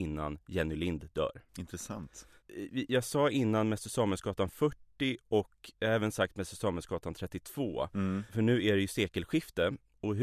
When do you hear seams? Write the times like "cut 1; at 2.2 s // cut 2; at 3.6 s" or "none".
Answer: cut 1; at 1.5 s // cut 2; at 5.7 s